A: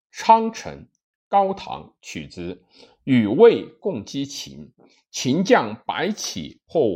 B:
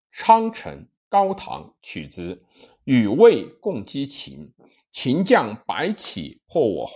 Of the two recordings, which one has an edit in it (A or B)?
B